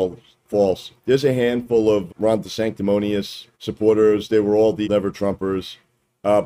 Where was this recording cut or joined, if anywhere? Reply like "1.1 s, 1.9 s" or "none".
1.0 s, 2.1 s, 3.5 s, 4.8 s